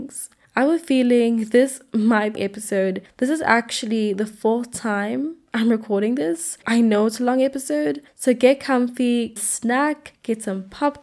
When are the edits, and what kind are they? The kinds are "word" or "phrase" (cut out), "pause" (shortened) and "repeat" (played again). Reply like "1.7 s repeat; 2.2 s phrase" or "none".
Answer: 2.3 s phrase; 6.6 s word; 9.4 s phrase

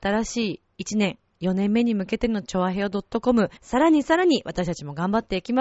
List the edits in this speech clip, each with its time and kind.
3.6 s pause

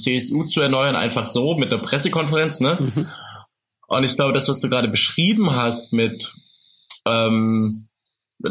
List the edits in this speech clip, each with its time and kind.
none

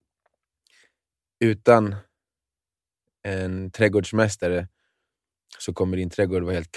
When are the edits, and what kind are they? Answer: none

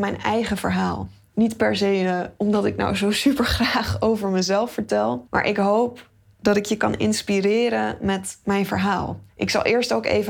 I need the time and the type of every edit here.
none

